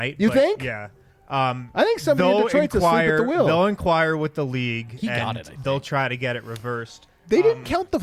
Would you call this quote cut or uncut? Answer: uncut